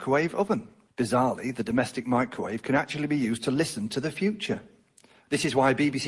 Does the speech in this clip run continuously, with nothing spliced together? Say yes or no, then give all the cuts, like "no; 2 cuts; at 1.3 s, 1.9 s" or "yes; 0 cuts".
yes; 0 cuts